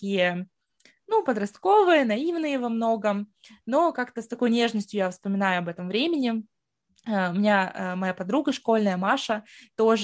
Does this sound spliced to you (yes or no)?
no